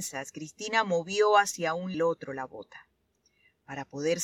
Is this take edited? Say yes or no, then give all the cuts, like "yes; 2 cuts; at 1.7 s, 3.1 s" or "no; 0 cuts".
yes; 1 cut; at 1.9 s